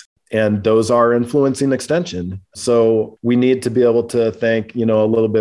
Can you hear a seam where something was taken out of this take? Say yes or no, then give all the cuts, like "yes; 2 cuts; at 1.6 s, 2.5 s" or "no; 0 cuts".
no; 0 cuts